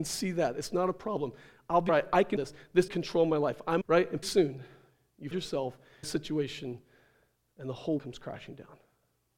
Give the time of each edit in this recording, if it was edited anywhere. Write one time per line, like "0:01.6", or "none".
0:01.9
0:02.4
0:02.9
0:03.8
0:04.2
0:05.3
0:06.0
0:08.0